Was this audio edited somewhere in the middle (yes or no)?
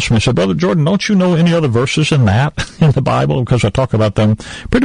no